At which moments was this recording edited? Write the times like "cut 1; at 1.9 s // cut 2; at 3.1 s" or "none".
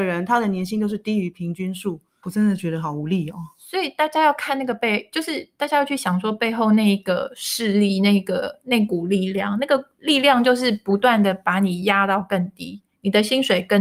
cut 1; at 2.2 s